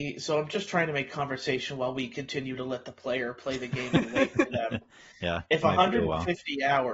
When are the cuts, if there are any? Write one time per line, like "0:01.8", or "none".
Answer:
none